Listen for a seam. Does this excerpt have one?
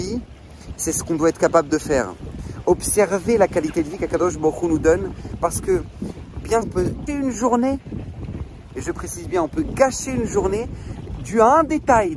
yes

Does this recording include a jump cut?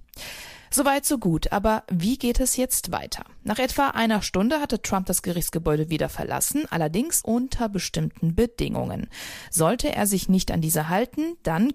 no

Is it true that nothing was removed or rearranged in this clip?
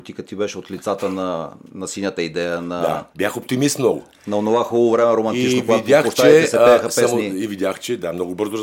no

